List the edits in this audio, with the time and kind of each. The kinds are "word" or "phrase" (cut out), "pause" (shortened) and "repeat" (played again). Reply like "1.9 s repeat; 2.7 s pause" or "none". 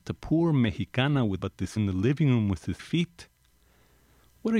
1.4 s word; 1.8 s word; 2.8 s word